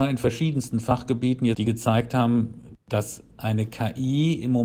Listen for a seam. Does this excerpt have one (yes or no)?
yes